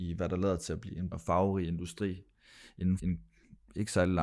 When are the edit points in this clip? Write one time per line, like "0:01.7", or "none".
0:01.1
0:03.0